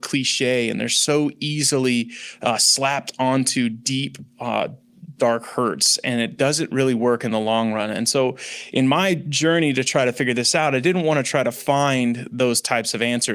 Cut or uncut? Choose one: uncut